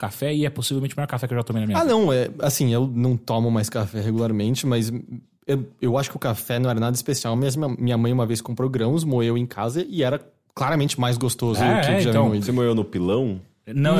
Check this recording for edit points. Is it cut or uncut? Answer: uncut